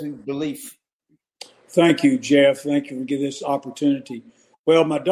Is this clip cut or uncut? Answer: uncut